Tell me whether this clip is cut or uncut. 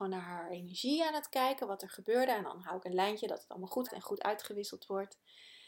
cut